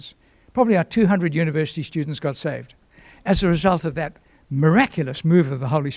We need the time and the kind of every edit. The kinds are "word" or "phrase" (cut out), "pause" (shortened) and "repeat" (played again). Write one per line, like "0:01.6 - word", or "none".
none